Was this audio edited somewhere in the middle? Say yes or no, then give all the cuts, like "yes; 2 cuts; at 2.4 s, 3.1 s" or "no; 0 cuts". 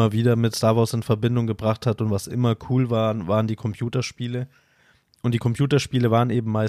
no; 0 cuts